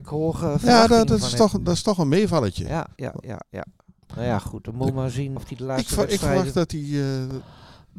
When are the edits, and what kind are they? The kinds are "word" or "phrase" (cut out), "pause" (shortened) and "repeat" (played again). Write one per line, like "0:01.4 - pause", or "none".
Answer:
0:03.0 - word
0:05.4 - word